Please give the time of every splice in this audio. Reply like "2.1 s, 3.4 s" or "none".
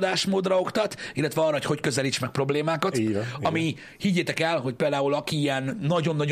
none

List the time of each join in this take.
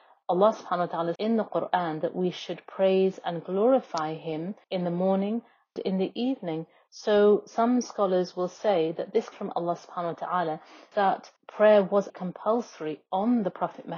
1.2 s, 4.6 s, 5.8 s, 9.3 s, 10.9 s, 11.4 s, 12.1 s

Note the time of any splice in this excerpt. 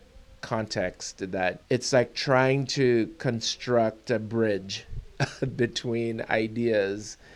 1.6 s

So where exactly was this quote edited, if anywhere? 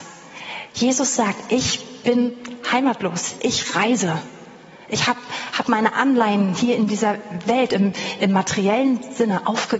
none

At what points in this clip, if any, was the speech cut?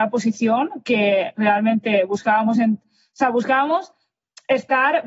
none

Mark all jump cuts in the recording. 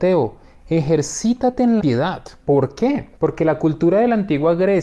1.8 s, 3.2 s

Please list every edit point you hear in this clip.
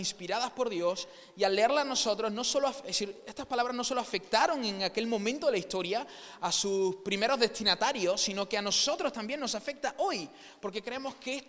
none

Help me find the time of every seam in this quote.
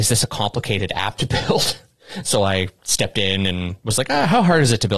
none

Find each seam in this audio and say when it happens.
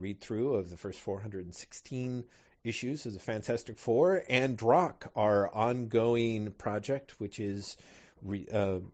none

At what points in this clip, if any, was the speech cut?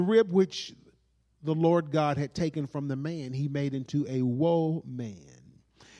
none

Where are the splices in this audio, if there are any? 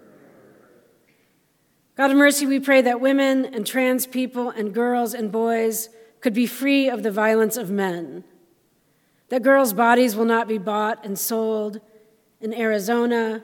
none

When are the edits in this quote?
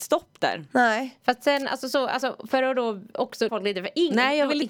3.5 s

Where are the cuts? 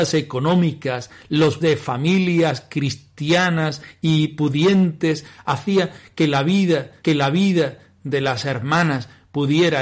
1.6 s, 7.0 s

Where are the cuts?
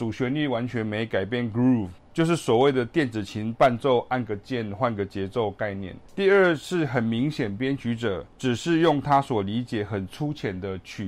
2.0 s, 6.1 s, 8.3 s

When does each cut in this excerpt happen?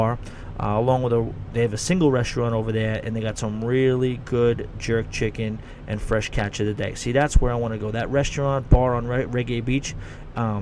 none

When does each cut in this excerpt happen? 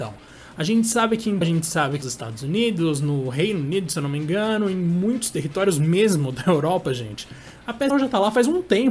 1.4 s, 2.0 s, 7.9 s

